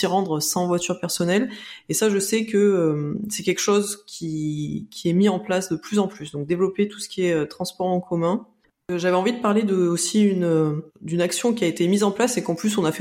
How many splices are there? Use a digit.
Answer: 1